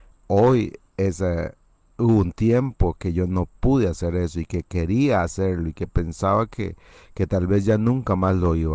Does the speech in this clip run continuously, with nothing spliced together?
yes; 0 cuts

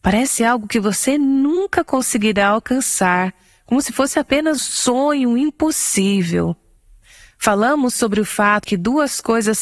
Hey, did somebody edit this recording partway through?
yes; 2 cuts; at 4.6 s, 8.6 s

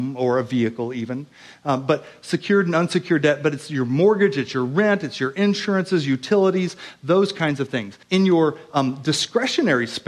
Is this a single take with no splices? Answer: no; 1 cut; at 8.0 s

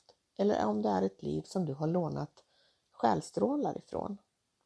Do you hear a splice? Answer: no; 0 cuts

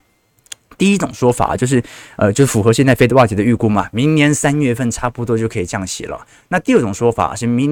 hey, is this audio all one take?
yes; 0 cuts

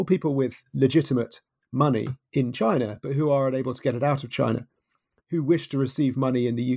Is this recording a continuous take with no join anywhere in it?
yes; 0 cuts

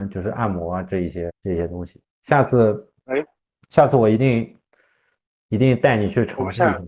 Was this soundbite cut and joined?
yes; 1 cut; at 1.3 s

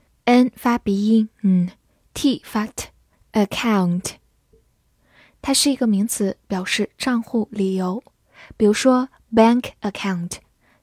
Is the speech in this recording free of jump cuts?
yes; 0 cuts

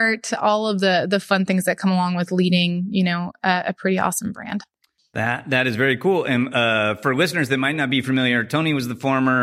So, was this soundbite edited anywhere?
no; 0 cuts

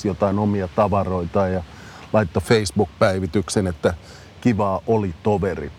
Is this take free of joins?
yes; 0 cuts

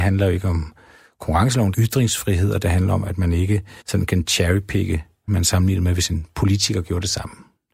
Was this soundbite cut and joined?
yes; 3 cuts; at 1.7 s, 3.8 s, 5.3 s

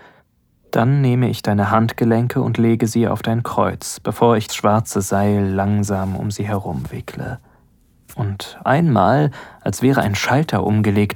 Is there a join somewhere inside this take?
yes; 2 cuts; at 4.5 s, 8.6 s

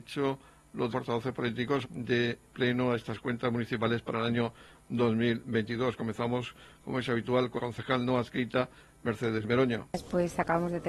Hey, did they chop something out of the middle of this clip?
yes; 4 cuts; at 0.9 s, 1.8 s, 2.4 s, 7.6 s

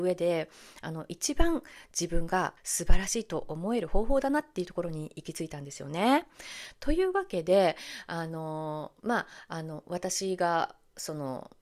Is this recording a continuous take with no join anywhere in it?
no; 1 cut; at 2.6 s

